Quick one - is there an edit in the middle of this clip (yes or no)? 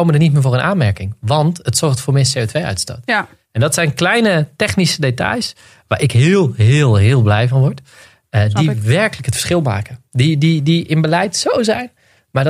no